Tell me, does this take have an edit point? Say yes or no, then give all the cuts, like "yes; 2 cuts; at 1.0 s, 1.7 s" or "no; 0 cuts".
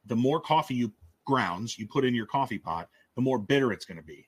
no; 0 cuts